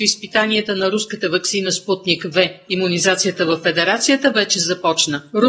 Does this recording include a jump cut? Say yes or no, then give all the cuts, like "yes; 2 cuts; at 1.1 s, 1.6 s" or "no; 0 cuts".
no; 0 cuts